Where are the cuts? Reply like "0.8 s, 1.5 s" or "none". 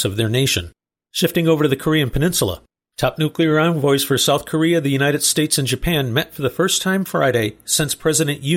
none